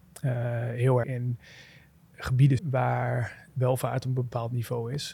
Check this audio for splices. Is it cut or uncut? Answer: cut